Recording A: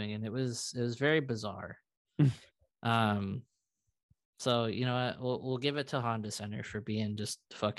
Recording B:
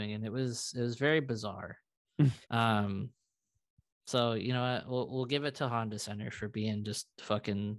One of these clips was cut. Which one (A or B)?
B